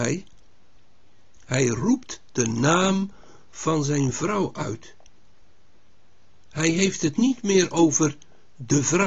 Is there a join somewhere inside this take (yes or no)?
no